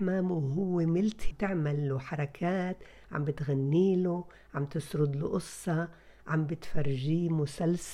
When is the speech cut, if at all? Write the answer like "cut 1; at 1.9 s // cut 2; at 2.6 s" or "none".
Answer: cut 1; at 1.3 s

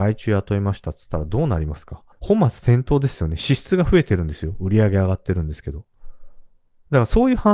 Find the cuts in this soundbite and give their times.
cut 1; at 2.1 s

